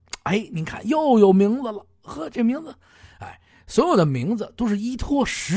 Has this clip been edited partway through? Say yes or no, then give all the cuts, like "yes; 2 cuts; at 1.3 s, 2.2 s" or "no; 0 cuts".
no; 0 cuts